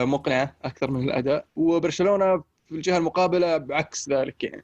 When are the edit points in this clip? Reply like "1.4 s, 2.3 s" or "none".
1.5 s